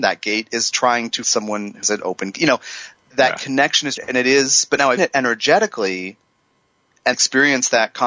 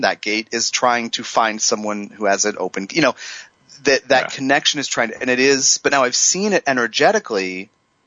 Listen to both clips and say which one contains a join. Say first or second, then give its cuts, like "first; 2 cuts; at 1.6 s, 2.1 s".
first; 6 cuts; at 1.2 s, 1.8 s, 3.1 s, 4.0 s, 5.0 s, 7.1 s